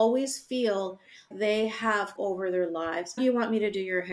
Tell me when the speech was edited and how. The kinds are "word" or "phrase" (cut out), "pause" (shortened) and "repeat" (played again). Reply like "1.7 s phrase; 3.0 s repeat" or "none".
1.3 s word; 2.2 s word; 3.2 s word